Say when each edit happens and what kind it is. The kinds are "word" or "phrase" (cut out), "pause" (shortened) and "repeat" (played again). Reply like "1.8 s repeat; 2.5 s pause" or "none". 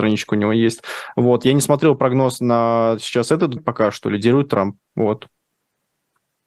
3.6 s phrase